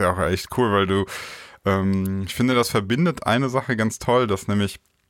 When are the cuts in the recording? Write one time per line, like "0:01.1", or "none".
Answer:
none